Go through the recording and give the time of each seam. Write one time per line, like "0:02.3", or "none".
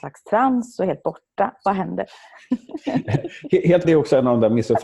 0:03.8